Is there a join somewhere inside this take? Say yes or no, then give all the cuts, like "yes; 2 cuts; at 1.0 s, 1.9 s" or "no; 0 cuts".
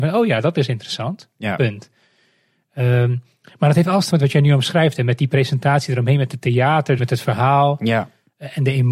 yes; 2 cuts; at 4.1 s, 7.0 s